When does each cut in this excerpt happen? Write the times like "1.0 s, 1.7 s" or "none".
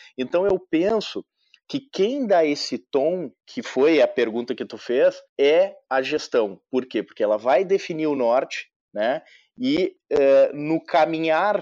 none